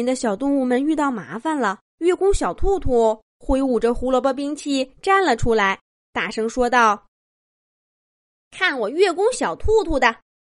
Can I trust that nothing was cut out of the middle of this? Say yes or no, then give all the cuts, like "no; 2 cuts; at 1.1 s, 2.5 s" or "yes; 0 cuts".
no; 2 cuts; at 1.9 s, 5.9 s